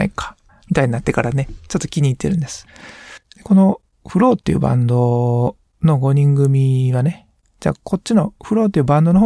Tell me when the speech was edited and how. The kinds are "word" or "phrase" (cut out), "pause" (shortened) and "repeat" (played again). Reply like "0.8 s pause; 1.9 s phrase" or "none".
none

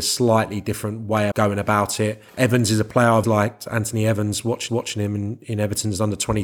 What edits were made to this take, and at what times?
1.3 s word; 2.3 s pause; 3.2 s word; 4.7 s repeat

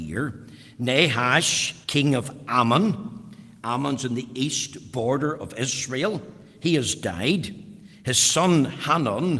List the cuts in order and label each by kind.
1.8 s pause

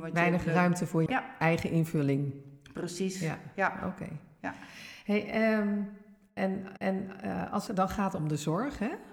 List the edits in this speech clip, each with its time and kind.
1.1 s word; 6.8 s repeat; 7.7 s word

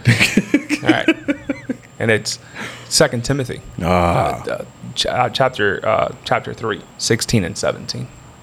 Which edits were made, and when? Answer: 6.9 s pause

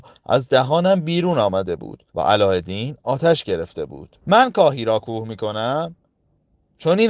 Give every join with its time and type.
2.1 s pause; 4.2 s pause

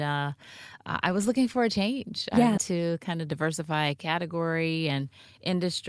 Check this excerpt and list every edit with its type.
2.6 s word

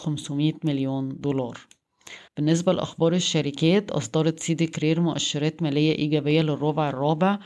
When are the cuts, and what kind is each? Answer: 2.3 s pause

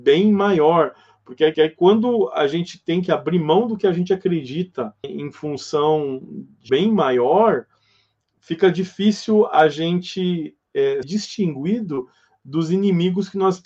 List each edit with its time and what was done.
1.5 s repeat; 5.0 s word; 6.7 s word; 11.0 s word

